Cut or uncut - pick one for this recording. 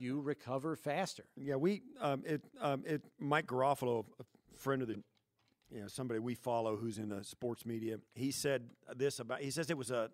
cut